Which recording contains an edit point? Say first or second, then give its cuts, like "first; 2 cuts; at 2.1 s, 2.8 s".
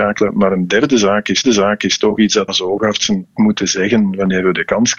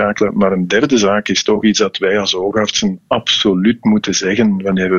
first; 3 cuts; at 1.4 s, 2.5 s, 3.3 s